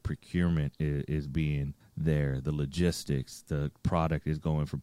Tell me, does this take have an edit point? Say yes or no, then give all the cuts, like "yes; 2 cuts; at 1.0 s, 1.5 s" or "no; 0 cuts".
yes; 1 cut; at 1.8 s